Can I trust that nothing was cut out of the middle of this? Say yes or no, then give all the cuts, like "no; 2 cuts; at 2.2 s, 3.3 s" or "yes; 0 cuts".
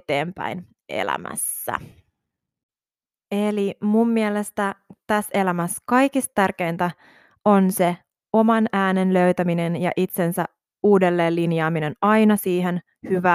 yes; 0 cuts